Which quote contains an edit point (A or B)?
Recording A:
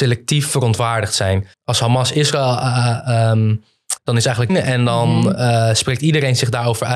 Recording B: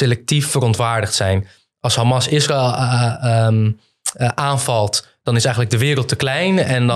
A